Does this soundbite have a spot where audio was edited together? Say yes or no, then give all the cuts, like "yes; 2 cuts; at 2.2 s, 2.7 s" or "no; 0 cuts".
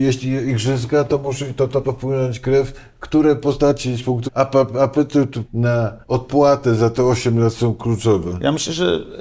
yes; 4 cuts; at 1.8 s, 4.3 s, 5.5 s, 6.0 s